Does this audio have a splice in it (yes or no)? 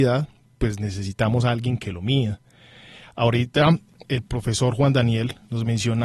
no